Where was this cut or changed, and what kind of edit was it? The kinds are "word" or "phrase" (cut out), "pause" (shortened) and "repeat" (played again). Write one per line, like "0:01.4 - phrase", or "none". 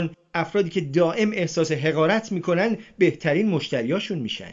none